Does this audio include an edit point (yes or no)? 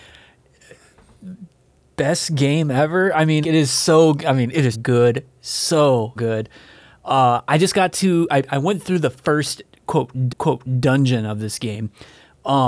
yes